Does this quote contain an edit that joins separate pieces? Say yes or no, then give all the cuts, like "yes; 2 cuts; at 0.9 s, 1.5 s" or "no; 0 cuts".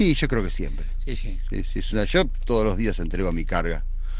yes; 1 cut; at 1.2 s